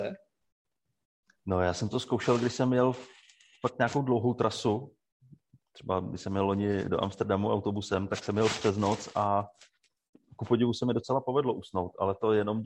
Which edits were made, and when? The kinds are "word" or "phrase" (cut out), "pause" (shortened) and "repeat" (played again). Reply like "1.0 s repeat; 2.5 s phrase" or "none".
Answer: none